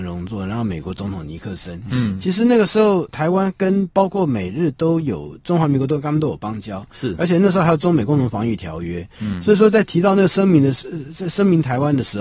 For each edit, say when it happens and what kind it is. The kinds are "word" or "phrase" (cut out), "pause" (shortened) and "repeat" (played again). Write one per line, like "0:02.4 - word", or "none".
none